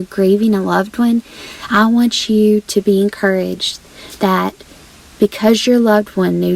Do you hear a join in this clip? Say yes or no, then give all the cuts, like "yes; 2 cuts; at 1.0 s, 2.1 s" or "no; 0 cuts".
no; 0 cuts